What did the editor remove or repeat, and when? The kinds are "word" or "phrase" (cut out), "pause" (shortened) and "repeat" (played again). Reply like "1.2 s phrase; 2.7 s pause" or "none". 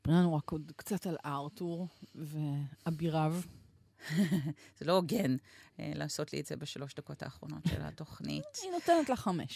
none